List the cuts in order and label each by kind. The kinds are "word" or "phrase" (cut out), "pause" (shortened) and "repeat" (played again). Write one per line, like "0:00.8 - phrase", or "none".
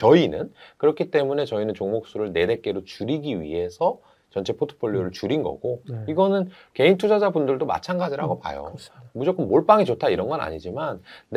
none